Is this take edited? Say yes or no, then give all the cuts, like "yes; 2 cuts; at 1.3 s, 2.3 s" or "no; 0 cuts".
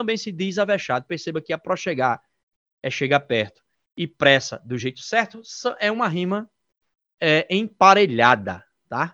no; 0 cuts